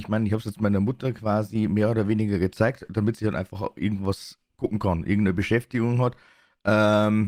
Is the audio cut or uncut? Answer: uncut